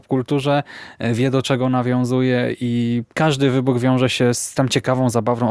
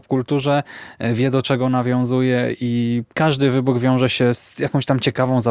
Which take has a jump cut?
first; 1 cut; at 4.5 s

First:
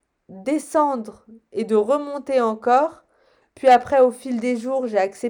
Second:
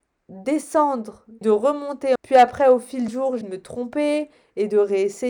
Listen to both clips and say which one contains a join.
second; 4 cuts; at 1.4 s, 2.2 s, 3.1 s, 3.4 s

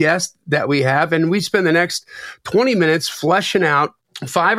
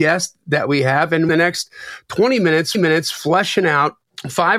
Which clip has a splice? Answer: second; 2 cuts; at 1.3 s, 2.7 s

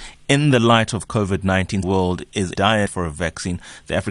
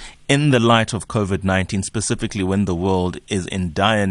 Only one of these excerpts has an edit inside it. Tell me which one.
first; 3 cuts; at 1.8 s, 2.5 s, 2.9 s

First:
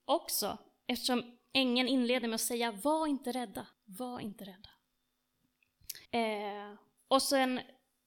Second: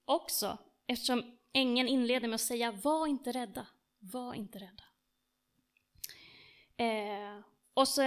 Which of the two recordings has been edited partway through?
first; 2 cuts; at 3.7 s, 6.1 s

